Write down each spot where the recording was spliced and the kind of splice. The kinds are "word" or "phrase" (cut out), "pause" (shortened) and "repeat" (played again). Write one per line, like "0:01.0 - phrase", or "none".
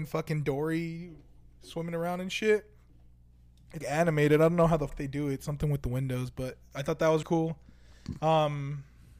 0:03.8 - word
0:04.9 - word
0:07.2 - word